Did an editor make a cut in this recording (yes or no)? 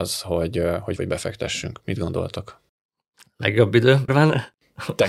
yes